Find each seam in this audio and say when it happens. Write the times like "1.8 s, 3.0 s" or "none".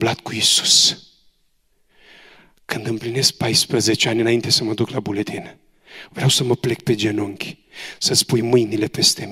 none